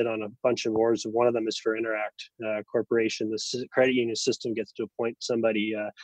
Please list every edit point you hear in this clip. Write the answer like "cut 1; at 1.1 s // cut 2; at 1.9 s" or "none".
none